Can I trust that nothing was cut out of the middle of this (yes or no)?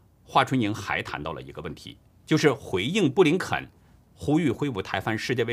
yes